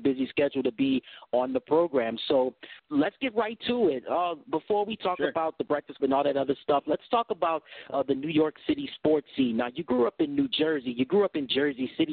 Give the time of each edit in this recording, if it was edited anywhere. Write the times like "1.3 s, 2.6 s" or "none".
2.8 s, 6.0 s